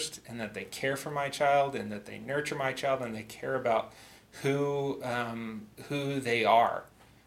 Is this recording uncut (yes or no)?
yes